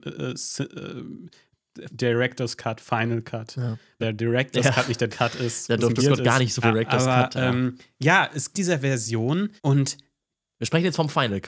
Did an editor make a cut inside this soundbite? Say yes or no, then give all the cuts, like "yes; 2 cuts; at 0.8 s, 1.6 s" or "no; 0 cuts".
yes; 7 cuts; at 1.9 s, 4.0 s, 5.1 s, 6.0 s, 6.6 s, 8.5 s, 9.6 s